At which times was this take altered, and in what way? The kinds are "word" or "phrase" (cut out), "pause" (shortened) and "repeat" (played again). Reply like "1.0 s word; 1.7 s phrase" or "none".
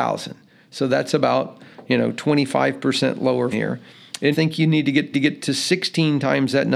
3.5 s word; 4.3 s phrase; 5.1 s repeat